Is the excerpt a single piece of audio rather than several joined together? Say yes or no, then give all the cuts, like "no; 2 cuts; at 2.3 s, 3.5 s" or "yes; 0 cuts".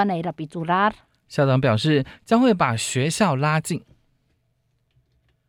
yes; 0 cuts